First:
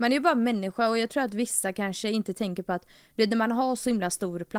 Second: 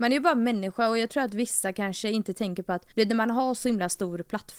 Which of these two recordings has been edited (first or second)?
second